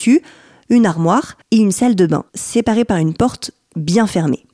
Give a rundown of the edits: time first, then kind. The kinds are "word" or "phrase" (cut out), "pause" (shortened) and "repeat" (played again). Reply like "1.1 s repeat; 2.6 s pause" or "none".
1.4 s pause; 2.3 s pause